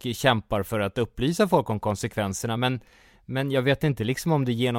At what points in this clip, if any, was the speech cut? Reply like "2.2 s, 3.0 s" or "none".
none